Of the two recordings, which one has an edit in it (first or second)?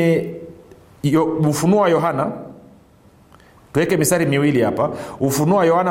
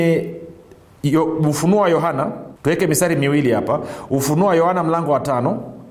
second